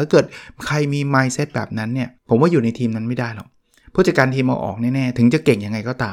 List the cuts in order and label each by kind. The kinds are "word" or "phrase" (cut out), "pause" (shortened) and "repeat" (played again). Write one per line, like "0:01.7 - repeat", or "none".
0:02.2 - pause